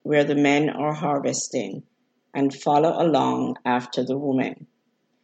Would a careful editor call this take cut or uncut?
uncut